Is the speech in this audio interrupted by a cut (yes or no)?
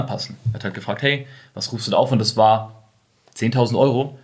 no